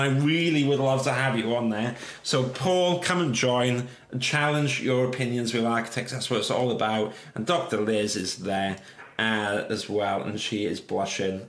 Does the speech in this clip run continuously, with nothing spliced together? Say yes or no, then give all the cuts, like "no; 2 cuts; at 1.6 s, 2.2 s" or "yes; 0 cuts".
yes; 0 cuts